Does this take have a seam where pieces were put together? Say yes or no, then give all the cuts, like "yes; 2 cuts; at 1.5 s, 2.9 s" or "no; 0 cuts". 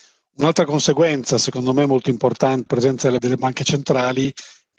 yes; 2 cuts; at 2.7 s, 3.2 s